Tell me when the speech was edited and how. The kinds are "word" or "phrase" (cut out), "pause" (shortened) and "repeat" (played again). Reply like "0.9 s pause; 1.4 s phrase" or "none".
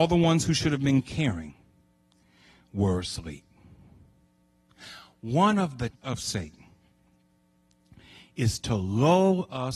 5.9 s word